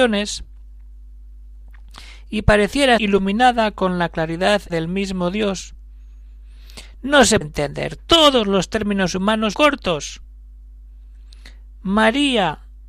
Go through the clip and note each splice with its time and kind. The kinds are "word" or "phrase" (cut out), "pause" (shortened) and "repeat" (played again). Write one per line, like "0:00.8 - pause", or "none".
0:03.0 - word
0:04.7 - word
0:07.4 - word
0:09.5 - word